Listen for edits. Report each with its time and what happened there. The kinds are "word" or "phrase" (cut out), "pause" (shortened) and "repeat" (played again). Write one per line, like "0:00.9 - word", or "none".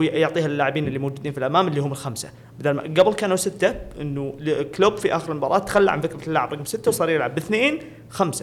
none